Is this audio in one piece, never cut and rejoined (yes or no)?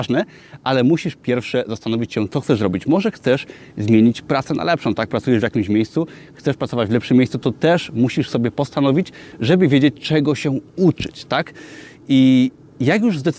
yes